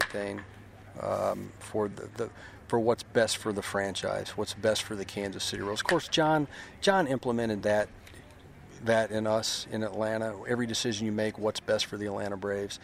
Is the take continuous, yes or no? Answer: yes